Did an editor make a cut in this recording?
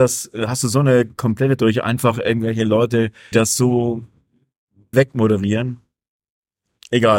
yes; 3 cuts; at 1.6 s, 3.3 s, 4.9 s

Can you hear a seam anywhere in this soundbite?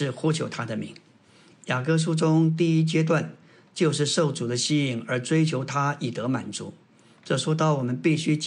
no; 0 cuts

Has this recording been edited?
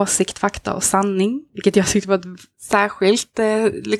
no; 0 cuts

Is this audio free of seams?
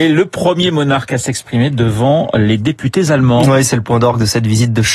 yes; 0 cuts

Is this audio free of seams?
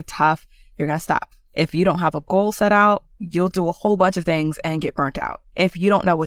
yes; 0 cuts

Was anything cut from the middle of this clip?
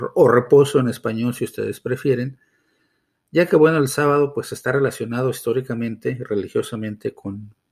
no; 0 cuts

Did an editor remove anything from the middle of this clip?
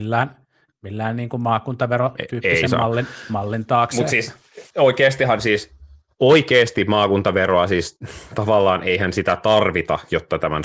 yes; 1 cut; at 4.7 s

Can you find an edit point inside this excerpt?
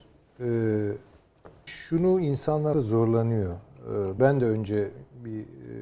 yes; 3 cuts; at 1.7 s, 2.7 s, 4.2 s

